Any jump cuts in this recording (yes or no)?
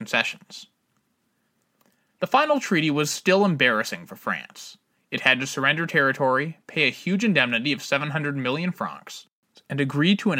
no